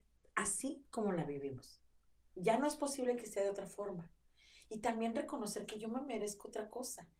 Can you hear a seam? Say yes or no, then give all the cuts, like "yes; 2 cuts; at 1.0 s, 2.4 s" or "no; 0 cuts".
no; 0 cuts